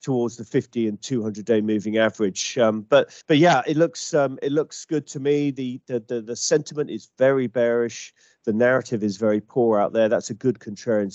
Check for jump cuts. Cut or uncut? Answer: cut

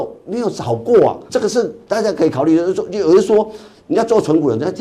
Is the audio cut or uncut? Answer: cut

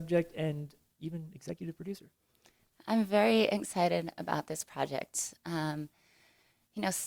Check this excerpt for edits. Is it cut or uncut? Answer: uncut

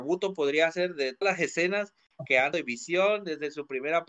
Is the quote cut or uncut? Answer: cut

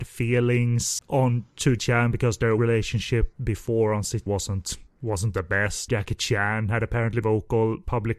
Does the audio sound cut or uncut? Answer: cut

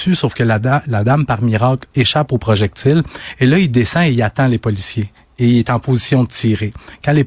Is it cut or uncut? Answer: uncut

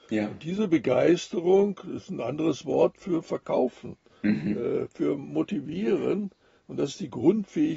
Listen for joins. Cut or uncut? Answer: uncut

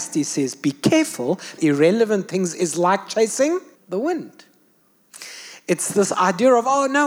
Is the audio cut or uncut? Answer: cut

